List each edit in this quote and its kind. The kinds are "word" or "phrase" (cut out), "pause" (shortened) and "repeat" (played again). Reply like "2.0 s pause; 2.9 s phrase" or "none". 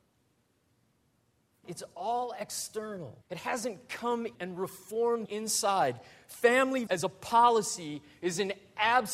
1.6 s phrase; 3.2 s pause; 4.3 s word; 5.2 s phrase; 6.9 s word

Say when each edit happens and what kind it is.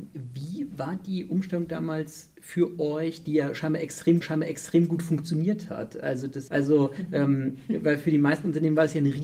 4.2 s repeat; 6.5 s phrase

